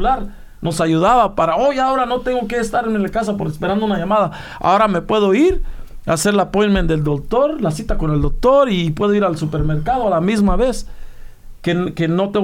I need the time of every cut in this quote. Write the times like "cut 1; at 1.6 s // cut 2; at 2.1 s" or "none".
none